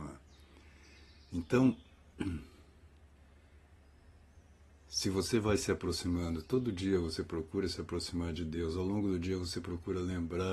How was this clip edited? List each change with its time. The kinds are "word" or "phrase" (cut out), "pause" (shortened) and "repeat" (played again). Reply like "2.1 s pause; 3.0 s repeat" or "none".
none